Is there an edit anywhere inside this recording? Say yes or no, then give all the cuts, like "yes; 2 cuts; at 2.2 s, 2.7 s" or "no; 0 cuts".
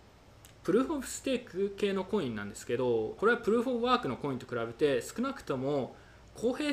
yes; 1 cut; at 3.2 s